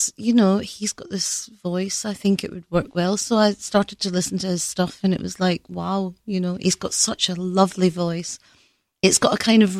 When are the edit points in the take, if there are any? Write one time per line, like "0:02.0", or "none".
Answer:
none